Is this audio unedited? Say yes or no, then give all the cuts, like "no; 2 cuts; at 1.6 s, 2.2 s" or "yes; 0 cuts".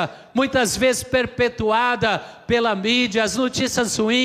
yes; 0 cuts